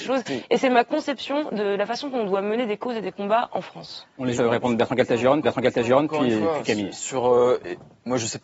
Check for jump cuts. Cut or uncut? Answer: cut